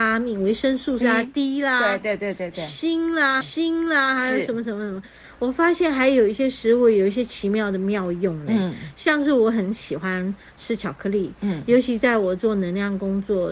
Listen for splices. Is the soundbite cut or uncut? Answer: cut